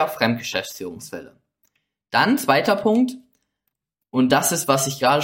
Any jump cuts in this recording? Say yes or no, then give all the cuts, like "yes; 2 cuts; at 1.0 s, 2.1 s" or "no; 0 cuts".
no; 0 cuts